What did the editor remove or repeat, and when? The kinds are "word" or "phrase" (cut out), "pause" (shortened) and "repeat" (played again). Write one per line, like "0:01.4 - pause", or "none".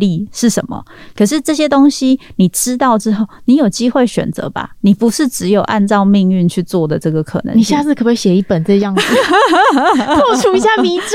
0:04.8 - pause